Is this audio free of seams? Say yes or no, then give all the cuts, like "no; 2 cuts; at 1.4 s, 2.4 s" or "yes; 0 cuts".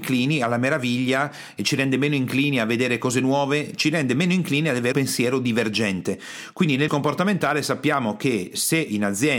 no; 2 cuts; at 4.9 s, 6.9 s